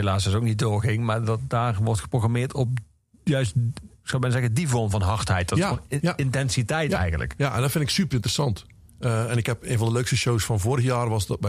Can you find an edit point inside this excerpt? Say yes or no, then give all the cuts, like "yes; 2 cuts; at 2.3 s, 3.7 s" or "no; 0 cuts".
no; 0 cuts